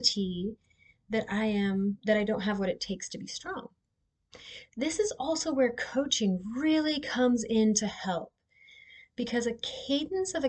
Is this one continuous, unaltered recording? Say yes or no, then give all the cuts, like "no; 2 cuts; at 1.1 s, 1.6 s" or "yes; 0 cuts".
yes; 0 cuts